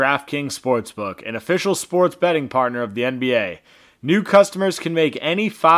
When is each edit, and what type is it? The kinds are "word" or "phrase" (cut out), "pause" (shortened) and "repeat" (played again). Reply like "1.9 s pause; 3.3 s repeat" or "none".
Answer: none

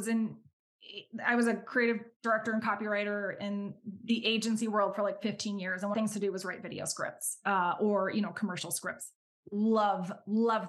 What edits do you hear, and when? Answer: 5.9 s phrase

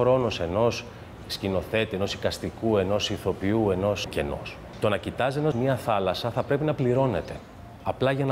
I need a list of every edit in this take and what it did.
4.1 s phrase; 5.5 s word

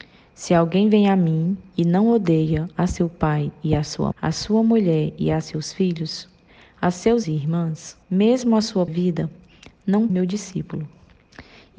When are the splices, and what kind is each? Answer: 4.1 s word; 7.2 s word; 8.0 s pause; 8.9 s word; 10.1 s phrase

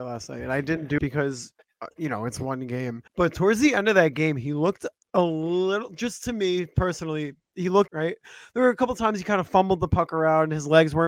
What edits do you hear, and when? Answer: 1.0 s word; 3.1 s pause; 5.0 s pause; 7.9 s phrase

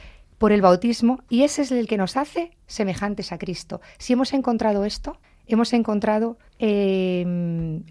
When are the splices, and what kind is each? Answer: 5.2 s pause; 6.5 s pause

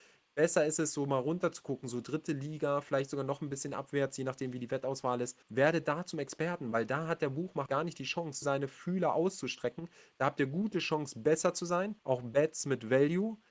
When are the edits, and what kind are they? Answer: 5.4 s pause; 7.7 s word; 8.4 s word; 12.0 s pause

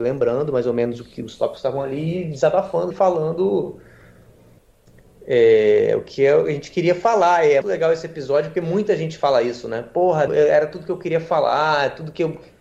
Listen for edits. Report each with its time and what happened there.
2.9 s word; 7.6 s word; 10.3 s word

